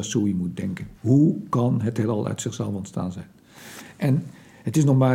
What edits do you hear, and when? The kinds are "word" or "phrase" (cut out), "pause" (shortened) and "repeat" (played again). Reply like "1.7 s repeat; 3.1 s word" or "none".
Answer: 0.9 s pause